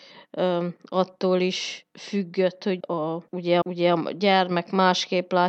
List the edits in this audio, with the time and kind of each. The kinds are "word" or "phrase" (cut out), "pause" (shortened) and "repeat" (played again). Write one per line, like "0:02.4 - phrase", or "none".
0:01.9 - pause
0:02.8 - word
0:03.6 - repeat